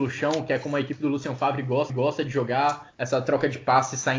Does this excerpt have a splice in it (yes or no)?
yes